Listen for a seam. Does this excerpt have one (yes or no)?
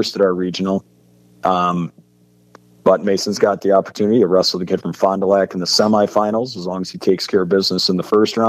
no